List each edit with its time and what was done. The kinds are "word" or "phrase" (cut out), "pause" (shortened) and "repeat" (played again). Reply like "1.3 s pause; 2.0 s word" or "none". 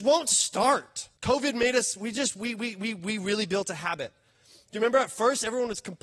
1.2 s pause